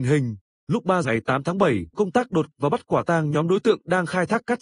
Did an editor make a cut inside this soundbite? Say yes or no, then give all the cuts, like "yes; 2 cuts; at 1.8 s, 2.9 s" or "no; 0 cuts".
yes; 3 cuts; at 1.0 s, 1.9 s, 2.5 s